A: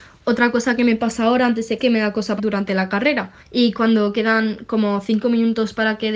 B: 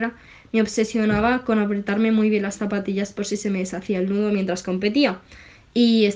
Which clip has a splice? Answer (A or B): A